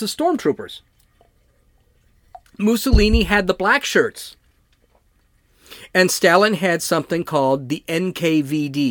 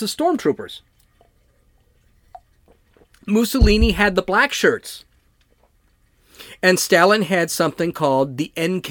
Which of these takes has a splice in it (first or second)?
first